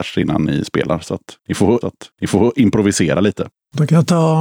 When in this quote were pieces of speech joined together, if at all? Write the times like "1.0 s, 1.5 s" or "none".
1.8 s

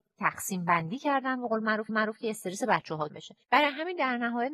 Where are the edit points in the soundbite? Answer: 1.9 s, 3.1 s, 3.4 s

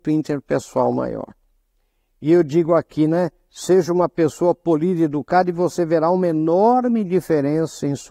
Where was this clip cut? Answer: none

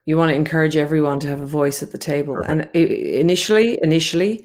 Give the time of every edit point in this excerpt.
none

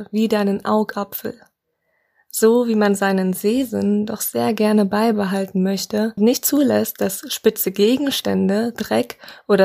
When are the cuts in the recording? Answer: 6.2 s

